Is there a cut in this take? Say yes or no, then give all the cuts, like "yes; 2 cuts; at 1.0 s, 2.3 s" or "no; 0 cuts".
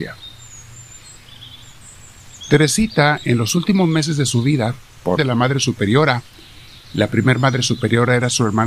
yes; 1 cut; at 5.2 s